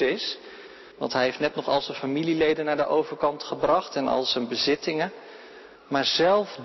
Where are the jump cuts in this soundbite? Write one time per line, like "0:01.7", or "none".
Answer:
0:00.9
0:05.8